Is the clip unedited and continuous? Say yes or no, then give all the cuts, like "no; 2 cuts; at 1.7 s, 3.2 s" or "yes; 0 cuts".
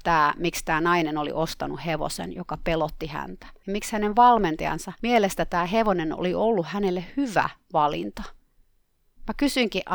yes; 0 cuts